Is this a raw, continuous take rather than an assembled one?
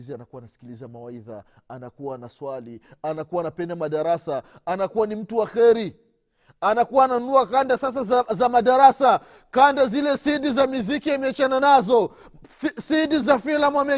yes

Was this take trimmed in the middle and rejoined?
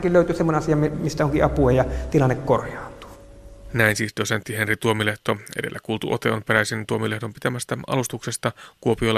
no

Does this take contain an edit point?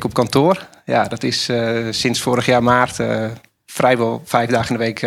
no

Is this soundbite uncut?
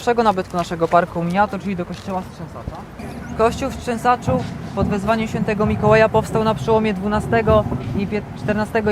yes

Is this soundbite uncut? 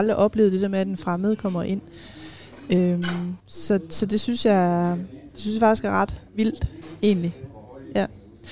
no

